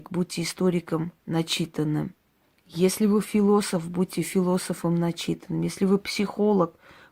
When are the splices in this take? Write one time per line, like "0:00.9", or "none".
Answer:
0:01.2